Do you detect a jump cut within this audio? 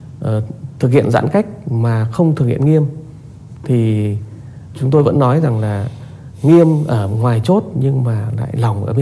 yes; 1 cut; at 4.7 s

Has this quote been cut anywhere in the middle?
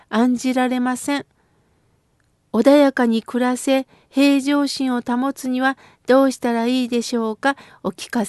no; 0 cuts

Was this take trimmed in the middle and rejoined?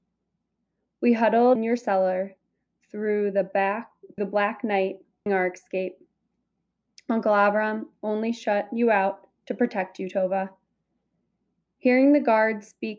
yes; 3 cuts; at 1.6 s, 4.2 s, 5.3 s

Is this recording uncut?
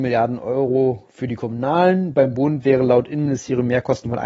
yes; 0 cuts

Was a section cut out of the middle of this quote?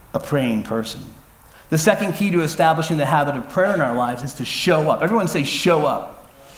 no; 0 cuts

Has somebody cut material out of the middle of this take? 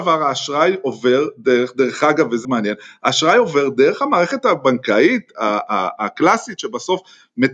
yes; 1 cut; at 2.4 s

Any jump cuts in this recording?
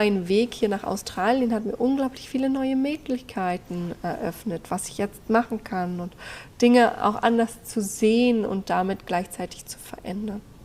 no; 0 cuts

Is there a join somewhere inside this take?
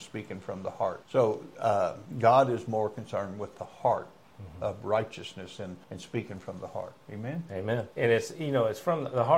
yes; 4 cuts; at 1.0 s, 5.8 s, 7.0 s, 7.9 s

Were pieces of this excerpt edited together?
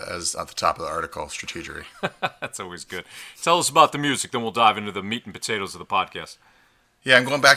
no; 0 cuts

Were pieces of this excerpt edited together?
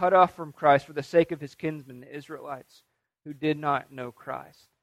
no; 0 cuts

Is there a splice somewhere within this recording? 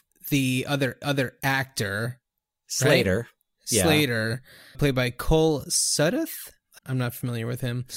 yes; 3 cuts; at 1.0 s, 4.7 s, 6.8 s

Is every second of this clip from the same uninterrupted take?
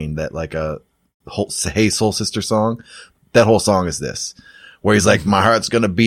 yes; 0 cuts

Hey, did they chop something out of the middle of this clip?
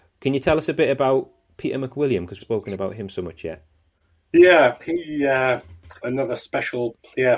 yes; 3 cuts; at 2.4 s, 4.8 s, 6.0 s

